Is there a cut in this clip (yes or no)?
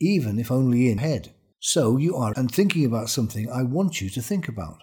yes